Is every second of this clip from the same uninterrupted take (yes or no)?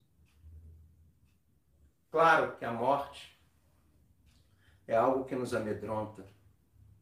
yes